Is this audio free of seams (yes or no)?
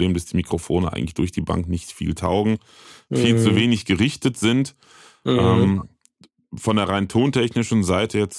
yes